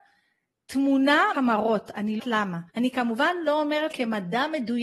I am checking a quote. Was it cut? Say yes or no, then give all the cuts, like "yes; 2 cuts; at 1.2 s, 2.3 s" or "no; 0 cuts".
yes; 4 cuts; at 1.3 s, 2.2 s, 2.7 s, 3.9 s